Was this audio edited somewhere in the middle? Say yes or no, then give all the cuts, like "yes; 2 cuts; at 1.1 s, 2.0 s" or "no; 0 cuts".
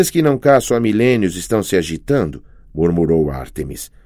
no; 0 cuts